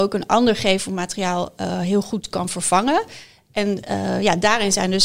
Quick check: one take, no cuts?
yes; 0 cuts

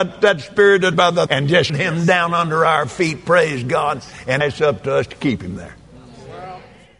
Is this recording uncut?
no; 4 cuts; at 0.9 s, 1.3 s, 1.7 s, 4.4 s

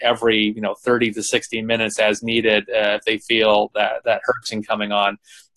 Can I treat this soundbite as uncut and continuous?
yes; 0 cuts

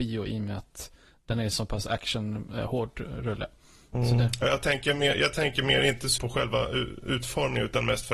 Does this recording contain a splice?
yes; 1 cut; at 6.2 s

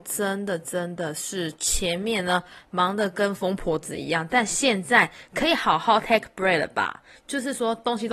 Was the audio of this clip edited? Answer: no; 0 cuts

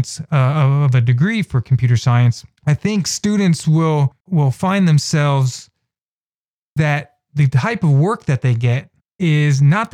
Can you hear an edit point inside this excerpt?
yes; 3 cuts; at 2.6 s, 4.2 s, 6.8 s

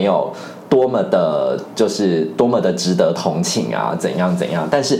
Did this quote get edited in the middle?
no; 0 cuts

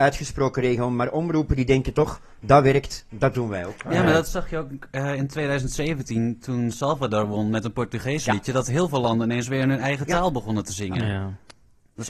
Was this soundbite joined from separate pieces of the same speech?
no; 0 cuts

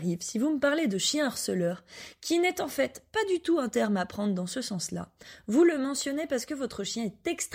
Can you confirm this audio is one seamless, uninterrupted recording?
yes; 0 cuts

